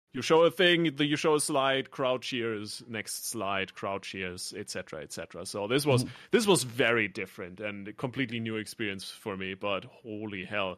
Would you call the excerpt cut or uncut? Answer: uncut